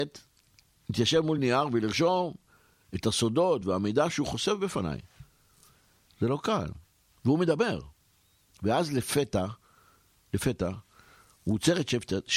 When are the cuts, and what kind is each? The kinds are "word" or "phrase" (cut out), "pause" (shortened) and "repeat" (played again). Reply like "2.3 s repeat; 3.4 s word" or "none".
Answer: none